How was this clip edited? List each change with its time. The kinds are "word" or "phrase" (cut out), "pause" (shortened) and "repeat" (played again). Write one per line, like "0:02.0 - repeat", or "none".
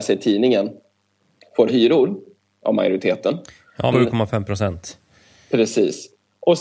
0:01.7 - word
0:03.9 - word